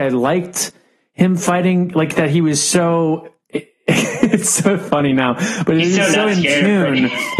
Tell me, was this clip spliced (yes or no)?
no